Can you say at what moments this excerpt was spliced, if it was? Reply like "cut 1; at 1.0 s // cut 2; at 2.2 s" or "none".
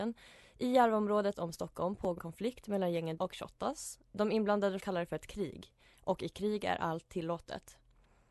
cut 1; at 1.3 s // cut 2; at 2.2 s // cut 3; at 3.2 s // cut 4; at 4.8 s

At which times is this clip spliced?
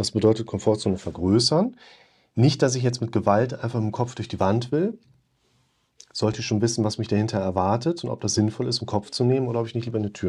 none

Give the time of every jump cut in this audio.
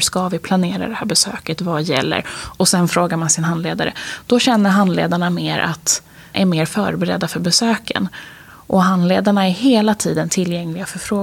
cut 1; at 6.3 s

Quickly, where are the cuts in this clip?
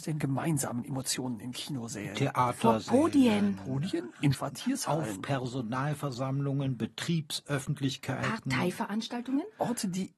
cut 1; at 4.3 s

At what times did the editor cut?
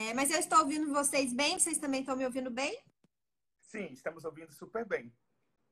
none

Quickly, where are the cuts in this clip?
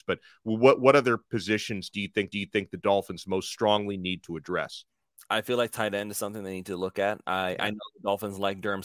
cut 1; at 2.3 s

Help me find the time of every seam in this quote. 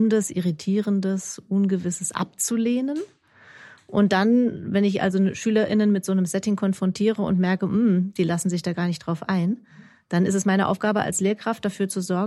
none

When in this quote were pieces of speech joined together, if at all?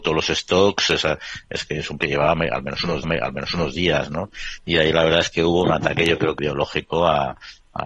cut 1; at 2.0 s // cut 2; at 3.0 s // cut 3; at 6.4 s

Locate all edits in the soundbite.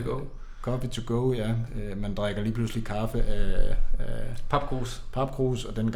none

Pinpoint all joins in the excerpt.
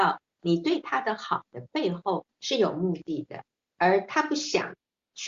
cut 1; at 2.3 s

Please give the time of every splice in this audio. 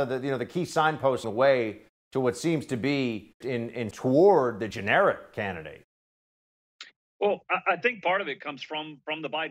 cut 1; at 1.2 s // cut 2; at 3.4 s // cut 3; at 3.9 s // cut 4; at 4.7 s

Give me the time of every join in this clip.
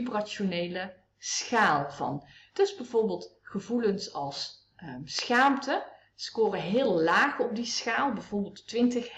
none

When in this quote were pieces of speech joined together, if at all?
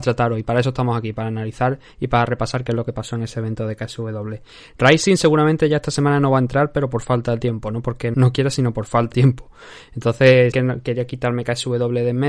cut 1; at 8.1 s // cut 2; at 9.1 s // cut 3; at 10.5 s

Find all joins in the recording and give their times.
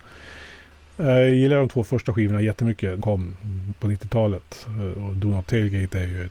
cut 1; at 3.0 s

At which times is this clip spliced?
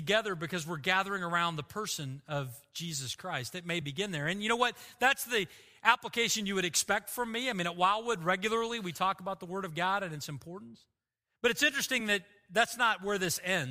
none

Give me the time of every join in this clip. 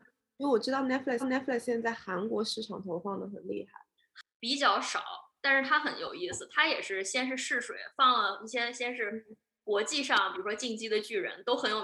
cut 1; at 1.2 s

